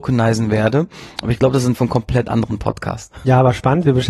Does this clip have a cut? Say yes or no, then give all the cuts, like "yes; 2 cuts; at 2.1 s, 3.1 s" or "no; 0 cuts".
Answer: yes; 1 cut; at 1.7 s